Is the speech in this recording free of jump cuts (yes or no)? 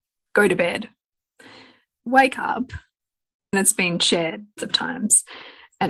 no